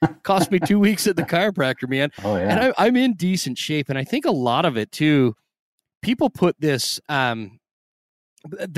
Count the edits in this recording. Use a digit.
0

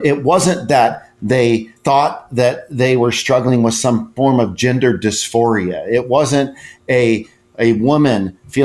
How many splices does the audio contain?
1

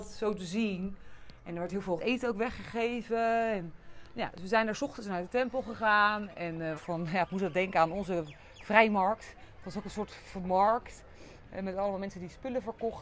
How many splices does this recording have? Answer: 2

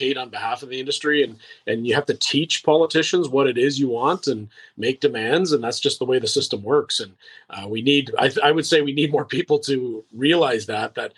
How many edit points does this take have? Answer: 0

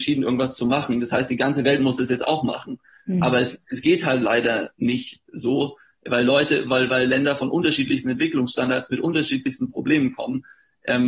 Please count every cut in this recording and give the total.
0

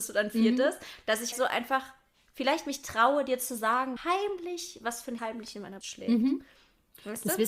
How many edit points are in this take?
4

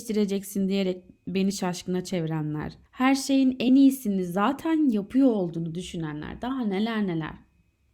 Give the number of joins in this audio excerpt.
0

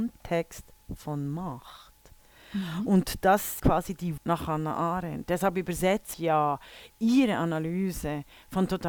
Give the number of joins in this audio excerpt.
3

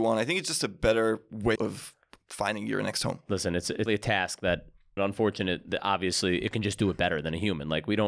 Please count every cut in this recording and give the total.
3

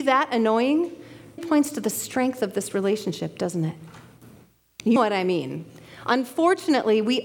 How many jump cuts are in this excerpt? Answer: 2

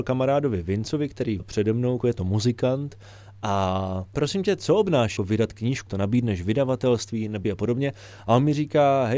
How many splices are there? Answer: 6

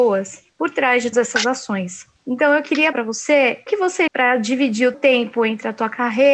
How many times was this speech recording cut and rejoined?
5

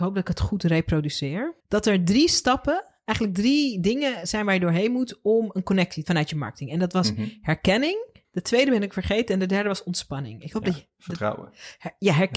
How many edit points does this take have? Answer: 3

